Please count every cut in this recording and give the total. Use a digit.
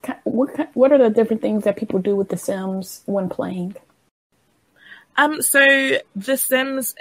1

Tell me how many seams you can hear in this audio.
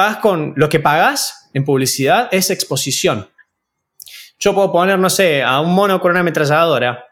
0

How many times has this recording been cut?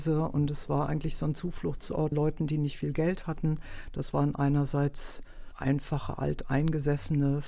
1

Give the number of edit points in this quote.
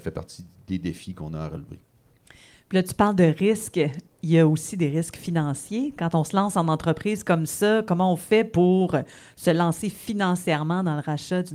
0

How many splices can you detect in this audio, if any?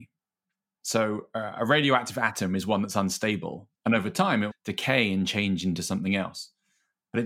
2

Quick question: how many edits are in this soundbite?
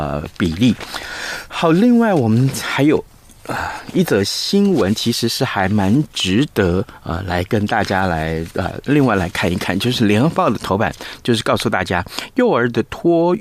0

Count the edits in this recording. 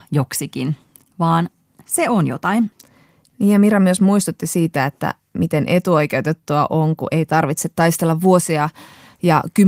0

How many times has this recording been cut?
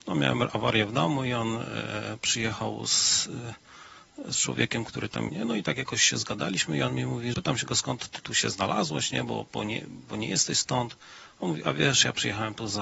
2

